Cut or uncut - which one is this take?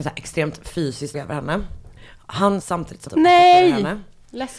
cut